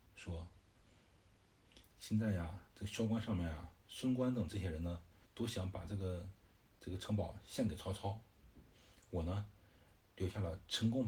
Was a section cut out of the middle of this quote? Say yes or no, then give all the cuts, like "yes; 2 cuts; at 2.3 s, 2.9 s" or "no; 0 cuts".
yes; 2 cuts; at 3.8 s, 5.2 s